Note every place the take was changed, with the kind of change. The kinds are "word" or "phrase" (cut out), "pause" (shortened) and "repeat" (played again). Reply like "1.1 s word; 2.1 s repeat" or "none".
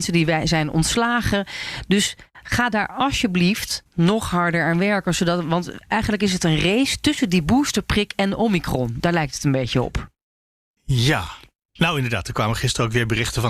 none